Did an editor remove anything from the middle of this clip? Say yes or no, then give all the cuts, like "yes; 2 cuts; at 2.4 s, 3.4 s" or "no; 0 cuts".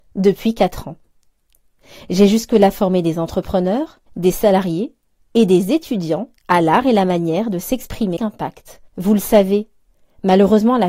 yes; 4 cuts; at 4.1 s, 6.4 s, 8.2 s, 8.9 s